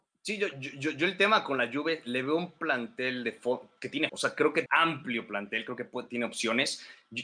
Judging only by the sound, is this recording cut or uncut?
cut